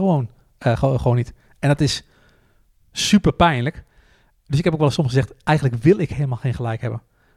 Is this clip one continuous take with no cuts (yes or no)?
yes